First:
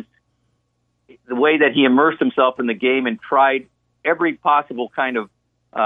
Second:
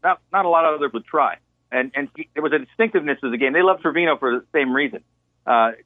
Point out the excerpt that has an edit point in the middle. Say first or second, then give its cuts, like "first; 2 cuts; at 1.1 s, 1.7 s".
second; 4 cuts; at 0.9 s, 1.7 s, 2.1 s, 3.8 s